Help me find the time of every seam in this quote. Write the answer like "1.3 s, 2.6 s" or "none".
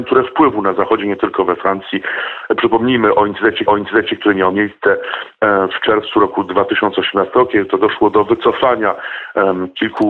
3.7 s

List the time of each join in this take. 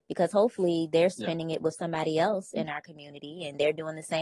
none

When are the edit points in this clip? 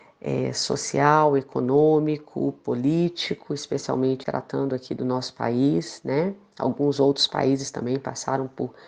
4.2 s

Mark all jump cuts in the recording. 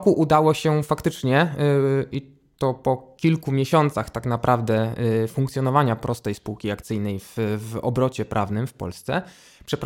none

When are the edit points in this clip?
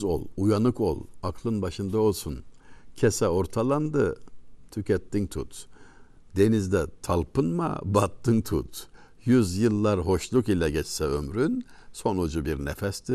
none

